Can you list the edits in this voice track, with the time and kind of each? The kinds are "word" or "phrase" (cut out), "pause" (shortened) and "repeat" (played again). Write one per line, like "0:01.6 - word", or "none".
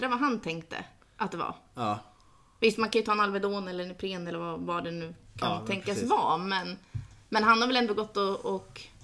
none